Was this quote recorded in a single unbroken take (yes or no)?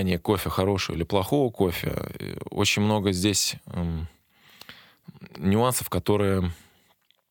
yes